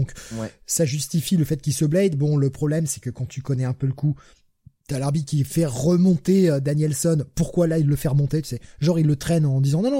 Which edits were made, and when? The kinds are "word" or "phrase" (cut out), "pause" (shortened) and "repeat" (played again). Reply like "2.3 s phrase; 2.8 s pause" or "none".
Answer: none